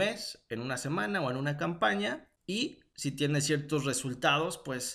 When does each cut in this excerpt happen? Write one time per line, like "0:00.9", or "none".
0:02.4